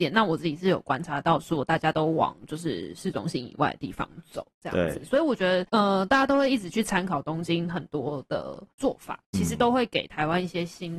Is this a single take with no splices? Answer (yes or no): no